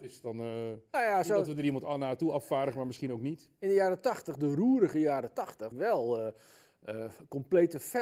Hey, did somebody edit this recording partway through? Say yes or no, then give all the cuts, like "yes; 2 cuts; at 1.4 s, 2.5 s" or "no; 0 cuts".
yes; 1 cut; at 5.7 s